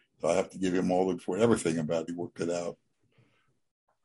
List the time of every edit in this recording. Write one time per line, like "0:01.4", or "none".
0:01.2
0:02.1

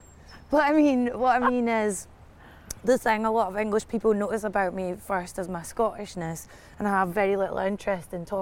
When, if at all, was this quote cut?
none

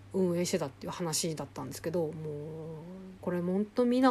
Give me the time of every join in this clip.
0:03.2

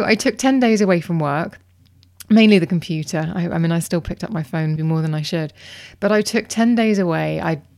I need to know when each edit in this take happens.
0:04.8

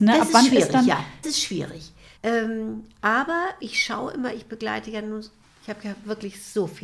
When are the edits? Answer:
0:01.2
0:02.2
0:03.6
0:05.4

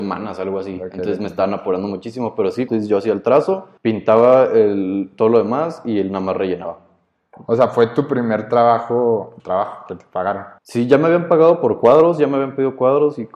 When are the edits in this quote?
0:02.7
0:03.8
0:09.4
0:10.6

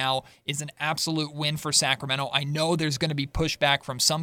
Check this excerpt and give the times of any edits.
none

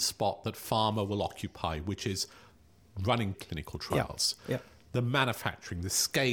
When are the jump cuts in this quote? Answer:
0:03.3

